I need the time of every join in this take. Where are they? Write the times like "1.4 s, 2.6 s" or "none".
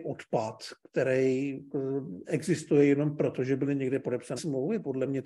4.4 s